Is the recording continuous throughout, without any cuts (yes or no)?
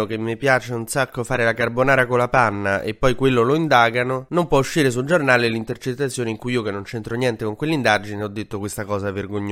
yes